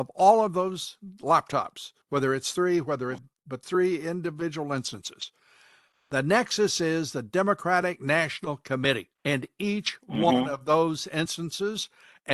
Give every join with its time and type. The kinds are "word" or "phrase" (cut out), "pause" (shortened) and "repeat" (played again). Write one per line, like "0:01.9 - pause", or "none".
0:02.0 - pause
0:03.2 - word
0:03.6 - word
0:09.2 - pause